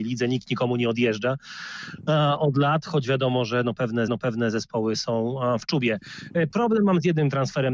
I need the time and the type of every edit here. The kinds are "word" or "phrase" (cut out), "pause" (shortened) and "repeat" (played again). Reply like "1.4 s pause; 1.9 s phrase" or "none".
4.1 s repeat